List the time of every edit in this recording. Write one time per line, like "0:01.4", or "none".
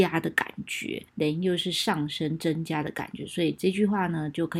0:01.1